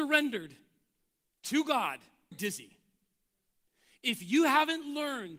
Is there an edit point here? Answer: yes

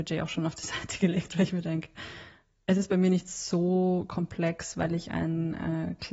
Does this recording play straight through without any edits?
yes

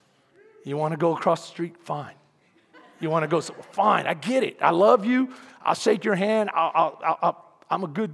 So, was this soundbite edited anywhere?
no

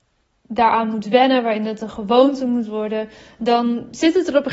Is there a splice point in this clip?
no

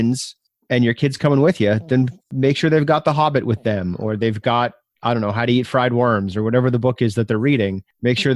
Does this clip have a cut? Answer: no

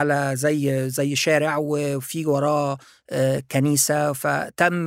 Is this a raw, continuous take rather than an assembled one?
yes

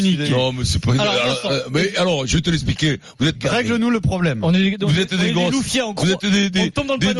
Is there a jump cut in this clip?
yes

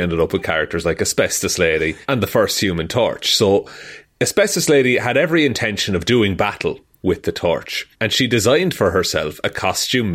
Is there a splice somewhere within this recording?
yes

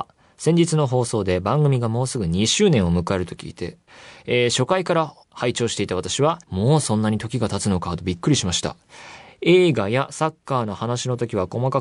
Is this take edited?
yes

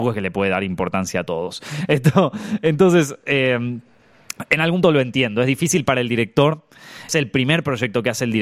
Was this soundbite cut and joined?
yes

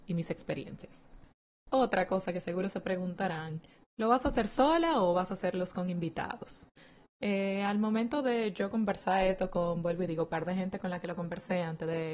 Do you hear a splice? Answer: no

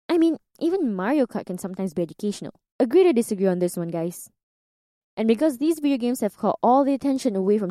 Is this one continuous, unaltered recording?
yes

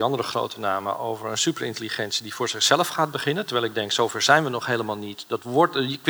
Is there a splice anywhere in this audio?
no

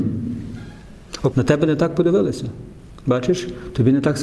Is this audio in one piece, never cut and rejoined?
no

